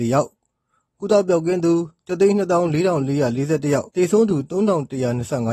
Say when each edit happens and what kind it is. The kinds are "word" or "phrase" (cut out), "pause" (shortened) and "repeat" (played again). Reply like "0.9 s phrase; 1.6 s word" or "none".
3.9 s pause